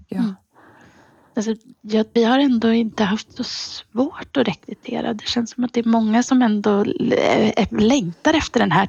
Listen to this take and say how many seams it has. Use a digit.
1